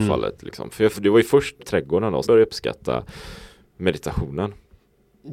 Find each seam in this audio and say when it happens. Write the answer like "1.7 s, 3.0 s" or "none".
0.9 s, 1.6 s, 2.2 s